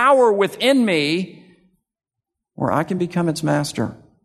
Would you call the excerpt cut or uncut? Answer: uncut